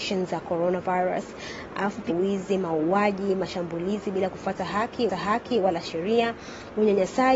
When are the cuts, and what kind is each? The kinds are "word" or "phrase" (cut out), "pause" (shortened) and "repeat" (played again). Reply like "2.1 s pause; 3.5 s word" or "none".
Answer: 2.1 s phrase; 5.1 s repeat

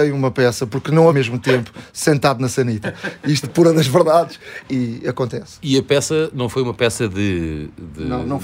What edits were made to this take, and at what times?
1.1 s word; 3.4 s word; 4.6 s word

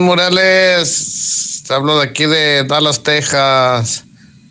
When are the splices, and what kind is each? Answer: none

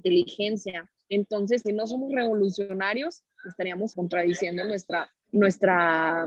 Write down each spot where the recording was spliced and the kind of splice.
1.6 s phrase; 3.9 s word; 5.2 s pause

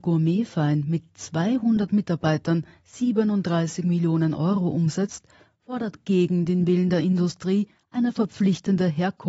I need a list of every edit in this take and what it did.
none

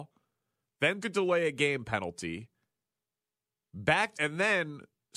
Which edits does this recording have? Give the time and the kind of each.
1.0 s word; 4.1 s word

